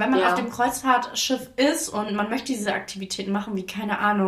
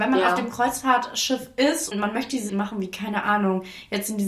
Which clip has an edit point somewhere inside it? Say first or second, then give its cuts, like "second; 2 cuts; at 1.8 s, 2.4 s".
second; 2 cuts; at 1.9 s, 2.5 s